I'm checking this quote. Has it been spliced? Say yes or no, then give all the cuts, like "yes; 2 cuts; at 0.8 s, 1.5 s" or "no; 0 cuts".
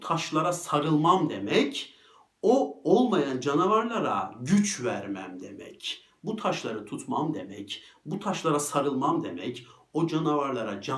no; 0 cuts